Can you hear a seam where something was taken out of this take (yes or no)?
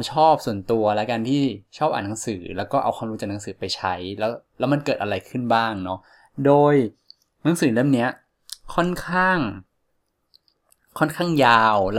no